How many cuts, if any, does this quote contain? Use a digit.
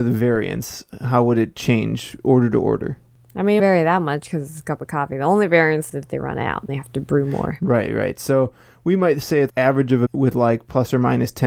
5